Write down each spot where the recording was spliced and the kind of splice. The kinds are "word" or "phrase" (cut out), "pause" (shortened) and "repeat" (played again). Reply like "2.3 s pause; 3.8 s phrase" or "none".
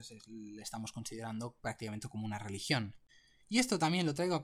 none